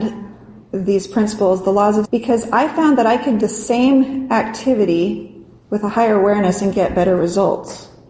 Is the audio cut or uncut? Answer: cut